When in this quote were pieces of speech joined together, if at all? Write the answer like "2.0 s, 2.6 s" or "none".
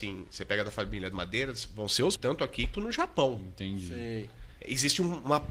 1.1 s, 2.2 s, 2.7 s, 4.6 s